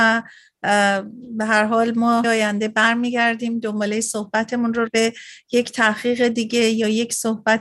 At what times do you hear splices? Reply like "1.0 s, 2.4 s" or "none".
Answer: 2.2 s, 4.9 s

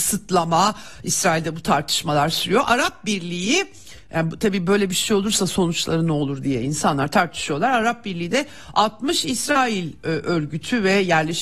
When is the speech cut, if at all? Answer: none

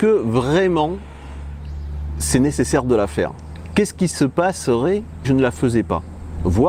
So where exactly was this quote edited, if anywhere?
5.2 s

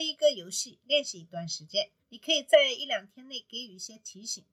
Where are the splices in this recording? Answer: 2.0 s

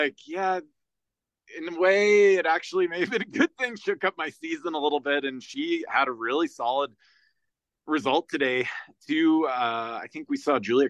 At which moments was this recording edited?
none

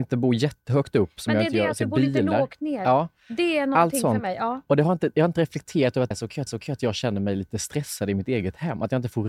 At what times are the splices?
6.1 s, 6.5 s

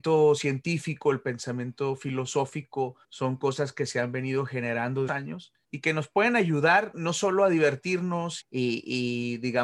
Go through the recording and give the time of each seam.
3.0 s, 5.1 s, 5.6 s, 6.9 s, 8.4 s

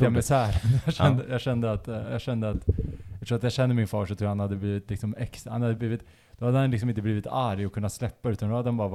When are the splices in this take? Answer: none

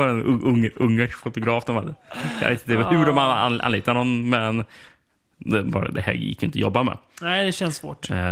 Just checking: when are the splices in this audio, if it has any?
none

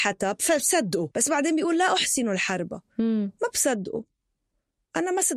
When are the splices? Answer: 1.1 s

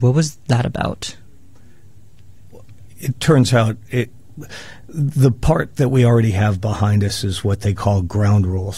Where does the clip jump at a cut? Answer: none

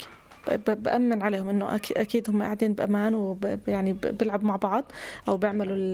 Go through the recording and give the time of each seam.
none

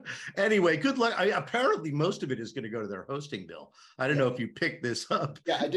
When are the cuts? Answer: none

